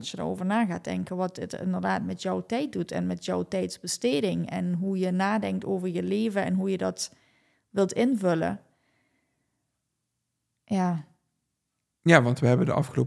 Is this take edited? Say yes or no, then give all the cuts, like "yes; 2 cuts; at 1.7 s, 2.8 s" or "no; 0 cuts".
no; 0 cuts